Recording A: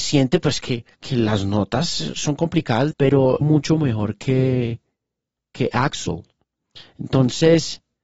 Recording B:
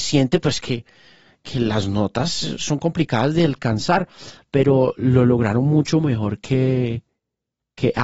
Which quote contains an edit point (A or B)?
A